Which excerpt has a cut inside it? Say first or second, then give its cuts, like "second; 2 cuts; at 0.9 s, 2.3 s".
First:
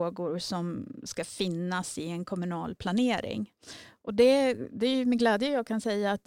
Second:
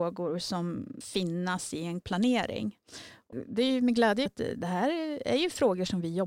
second; 4 cuts; at 1.0 s, 2.0 s, 3.3 s, 4.3 s